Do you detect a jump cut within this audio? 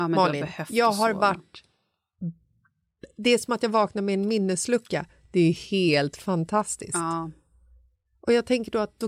no; 0 cuts

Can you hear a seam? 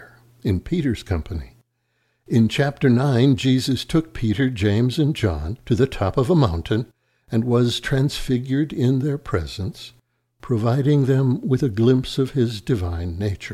no; 0 cuts

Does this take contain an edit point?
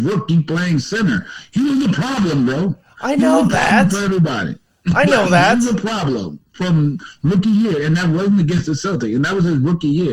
no; 0 cuts

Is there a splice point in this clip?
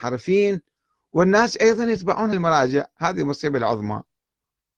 yes; 1 cut; at 2.3 s

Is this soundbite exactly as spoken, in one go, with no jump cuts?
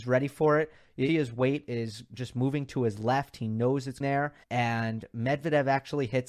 no; 3 cuts; at 1.1 s, 4.0 s, 4.4 s

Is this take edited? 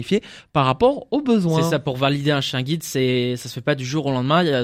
no; 0 cuts

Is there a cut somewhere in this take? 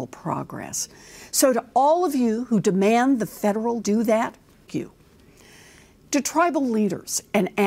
yes; 2 cuts; at 3.8 s, 4.7 s

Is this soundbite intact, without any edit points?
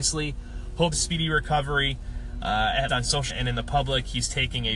no; 3 cuts; at 0.9 s, 2.9 s, 3.3 s

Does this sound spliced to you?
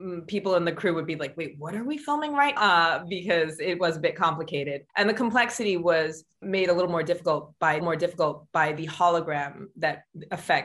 yes; 4 cuts; at 2.6 s, 4.9 s, 6.4 s, 7.8 s

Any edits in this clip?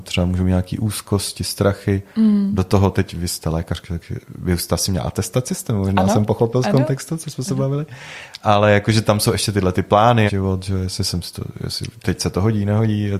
yes; 1 cut; at 10.3 s

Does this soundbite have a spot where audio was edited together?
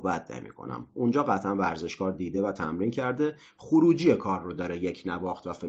no; 0 cuts

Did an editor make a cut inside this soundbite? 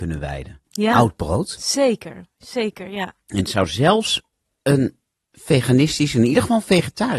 no; 0 cuts

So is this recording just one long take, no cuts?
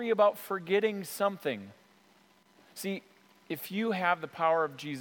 yes; 0 cuts

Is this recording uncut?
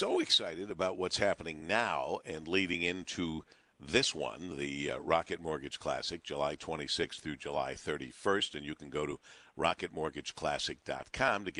yes; 0 cuts

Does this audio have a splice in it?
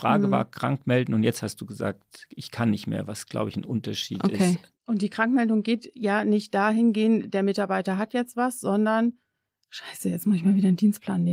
no; 0 cuts

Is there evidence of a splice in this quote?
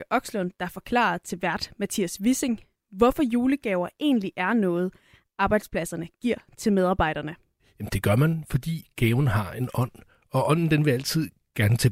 no; 0 cuts

